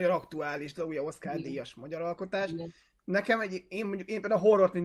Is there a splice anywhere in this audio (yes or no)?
no